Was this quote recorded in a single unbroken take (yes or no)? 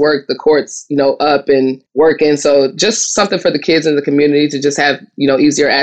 no